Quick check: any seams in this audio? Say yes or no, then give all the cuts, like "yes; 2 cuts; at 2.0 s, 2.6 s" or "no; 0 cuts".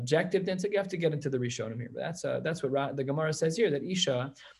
no; 0 cuts